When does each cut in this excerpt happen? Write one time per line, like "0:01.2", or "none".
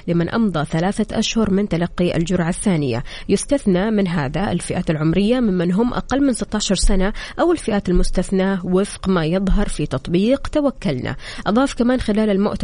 none